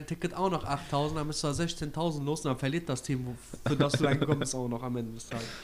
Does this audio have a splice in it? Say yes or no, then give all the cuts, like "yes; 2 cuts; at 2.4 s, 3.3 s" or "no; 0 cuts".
no; 0 cuts